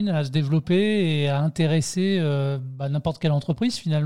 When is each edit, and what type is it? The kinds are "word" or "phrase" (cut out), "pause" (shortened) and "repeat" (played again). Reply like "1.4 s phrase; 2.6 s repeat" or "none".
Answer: none